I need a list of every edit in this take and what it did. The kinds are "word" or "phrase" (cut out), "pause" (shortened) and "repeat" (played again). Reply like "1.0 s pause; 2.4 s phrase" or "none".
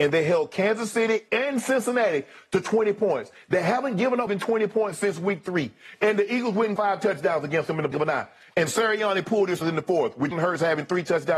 1.3 s word; 4.3 s word; 6.8 s word; 7.9 s word; 9.6 s word; 10.3 s word